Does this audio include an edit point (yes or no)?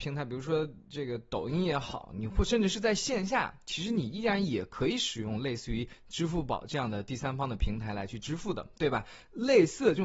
no